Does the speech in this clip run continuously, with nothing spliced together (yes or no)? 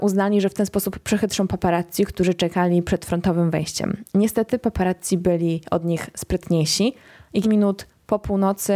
no